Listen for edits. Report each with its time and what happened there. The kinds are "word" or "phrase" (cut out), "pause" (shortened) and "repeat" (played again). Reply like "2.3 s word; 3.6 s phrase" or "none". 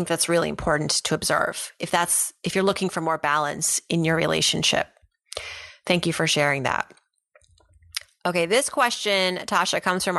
none